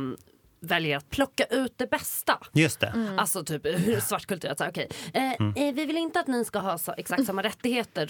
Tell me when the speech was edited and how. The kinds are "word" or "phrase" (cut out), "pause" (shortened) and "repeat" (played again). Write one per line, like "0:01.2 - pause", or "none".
0:01.1 - word